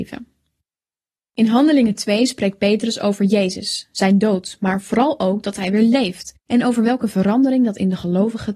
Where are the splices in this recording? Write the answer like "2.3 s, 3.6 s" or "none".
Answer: 6.4 s